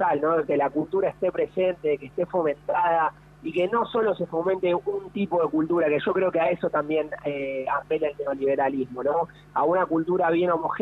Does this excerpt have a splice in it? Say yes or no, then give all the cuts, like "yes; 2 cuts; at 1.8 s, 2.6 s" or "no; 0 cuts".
no; 0 cuts